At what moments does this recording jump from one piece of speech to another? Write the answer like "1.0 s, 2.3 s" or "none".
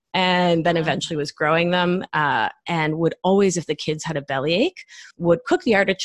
5.1 s